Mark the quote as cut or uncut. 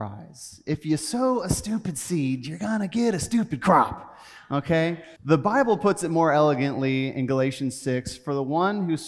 cut